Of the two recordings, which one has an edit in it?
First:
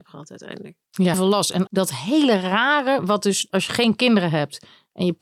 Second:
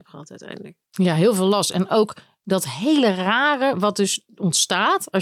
first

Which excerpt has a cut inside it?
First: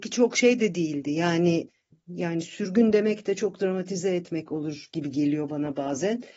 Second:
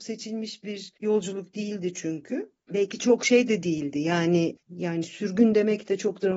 second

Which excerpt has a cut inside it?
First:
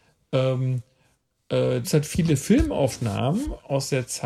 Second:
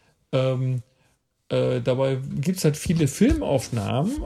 first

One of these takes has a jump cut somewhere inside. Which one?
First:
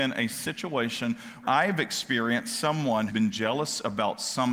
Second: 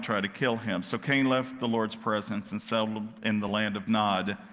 first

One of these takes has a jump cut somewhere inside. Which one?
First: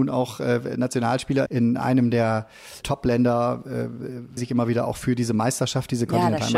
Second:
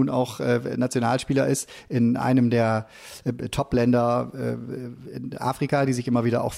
first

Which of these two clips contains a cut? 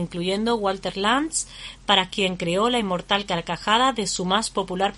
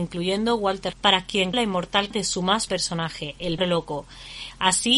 second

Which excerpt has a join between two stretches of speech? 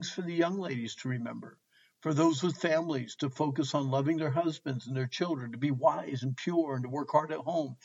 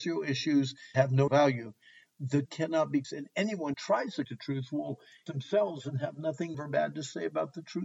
second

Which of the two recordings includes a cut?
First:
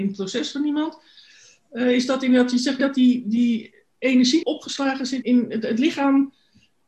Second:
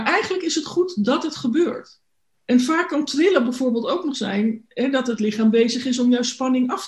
first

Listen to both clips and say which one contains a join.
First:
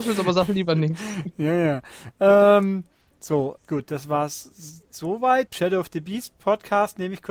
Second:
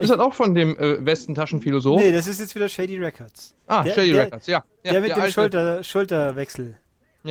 first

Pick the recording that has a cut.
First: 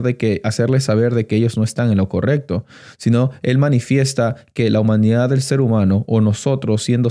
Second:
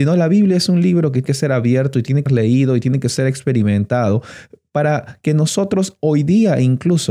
second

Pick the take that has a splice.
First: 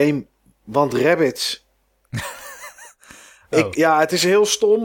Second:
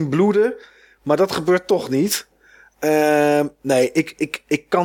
first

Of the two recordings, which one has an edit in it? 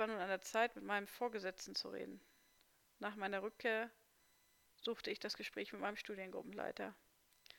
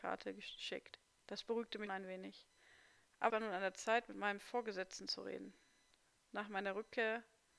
second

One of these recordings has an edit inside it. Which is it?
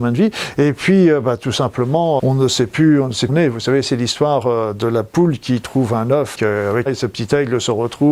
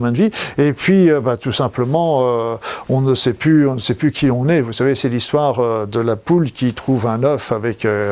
first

